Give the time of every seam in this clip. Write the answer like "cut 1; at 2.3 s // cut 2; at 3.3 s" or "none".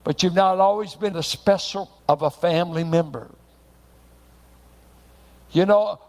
cut 1; at 1.1 s // cut 2; at 2.0 s